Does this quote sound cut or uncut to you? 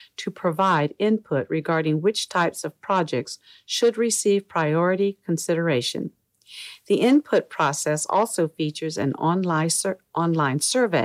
uncut